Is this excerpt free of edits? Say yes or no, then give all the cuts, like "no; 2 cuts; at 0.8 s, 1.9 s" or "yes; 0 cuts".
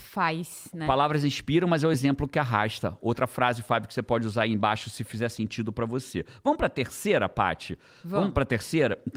yes; 0 cuts